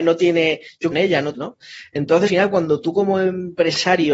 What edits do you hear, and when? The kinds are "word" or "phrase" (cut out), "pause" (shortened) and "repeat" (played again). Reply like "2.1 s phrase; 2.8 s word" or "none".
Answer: 0.9 s word; 1.3 s phrase; 2.3 s word